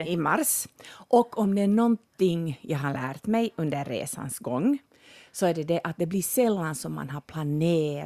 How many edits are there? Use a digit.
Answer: 0